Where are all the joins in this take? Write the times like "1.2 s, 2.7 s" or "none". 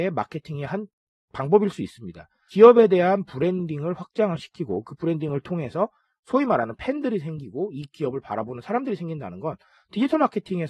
none